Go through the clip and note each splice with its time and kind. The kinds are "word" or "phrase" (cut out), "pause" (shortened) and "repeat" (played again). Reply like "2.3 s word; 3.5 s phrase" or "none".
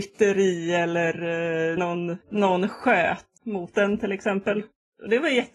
1.8 s word; 2.2 s pause; 3.4 s word